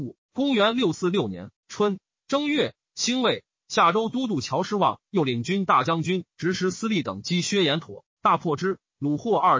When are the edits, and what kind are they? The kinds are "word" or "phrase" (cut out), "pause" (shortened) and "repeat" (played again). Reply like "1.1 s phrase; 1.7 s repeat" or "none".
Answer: 1.6 s pause